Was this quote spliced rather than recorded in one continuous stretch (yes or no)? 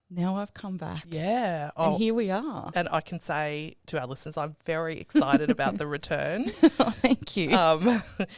no